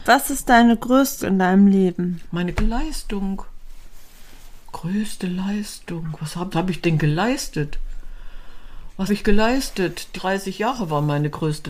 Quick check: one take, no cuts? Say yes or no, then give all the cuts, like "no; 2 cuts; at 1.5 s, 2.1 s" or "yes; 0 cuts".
no; 5 cuts; at 1.2 s, 2.5 s, 6.5 s, 9.1 s, 10.1 s